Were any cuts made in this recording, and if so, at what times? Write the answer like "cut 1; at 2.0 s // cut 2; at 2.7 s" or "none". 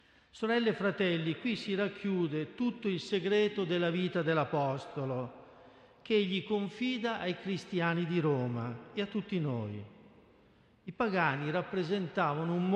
none

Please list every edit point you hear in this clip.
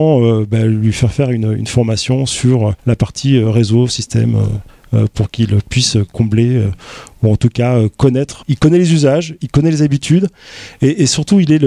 cut 1; at 2.8 s // cut 2; at 8.4 s

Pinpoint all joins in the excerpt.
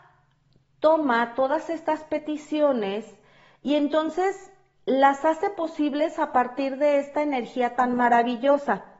none

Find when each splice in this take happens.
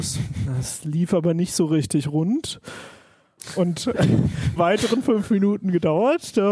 cut 1; at 4.6 s

